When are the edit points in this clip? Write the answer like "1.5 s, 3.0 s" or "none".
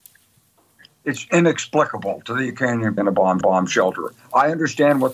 3.0 s, 3.4 s